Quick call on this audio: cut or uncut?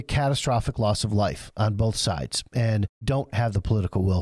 cut